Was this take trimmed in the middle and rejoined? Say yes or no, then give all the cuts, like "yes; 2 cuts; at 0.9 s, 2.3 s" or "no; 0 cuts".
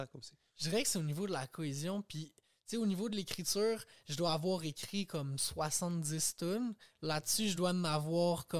no; 0 cuts